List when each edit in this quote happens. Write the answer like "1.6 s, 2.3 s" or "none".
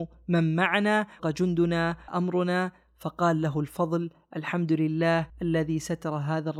1.2 s, 2.1 s, 5.3 s